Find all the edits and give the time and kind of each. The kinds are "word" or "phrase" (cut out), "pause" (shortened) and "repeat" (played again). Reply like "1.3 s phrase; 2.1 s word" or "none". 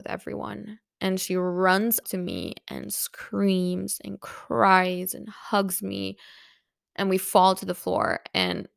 2.0 s word